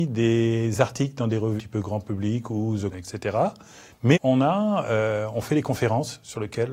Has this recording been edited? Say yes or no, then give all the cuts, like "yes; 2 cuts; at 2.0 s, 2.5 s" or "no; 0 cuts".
yes; 3 cuts; at 1.6 s, 2.9 s, 4.1 s